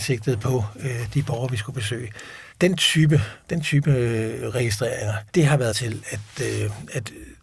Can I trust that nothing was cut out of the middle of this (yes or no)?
no